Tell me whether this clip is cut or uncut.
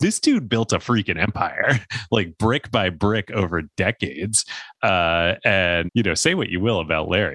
cut